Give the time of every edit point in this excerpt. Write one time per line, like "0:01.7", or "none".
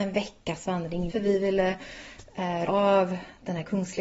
0:01.1
0:02.7